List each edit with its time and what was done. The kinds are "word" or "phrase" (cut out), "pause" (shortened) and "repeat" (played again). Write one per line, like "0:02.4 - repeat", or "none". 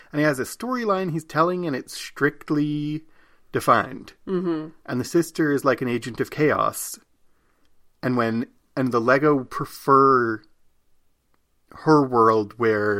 none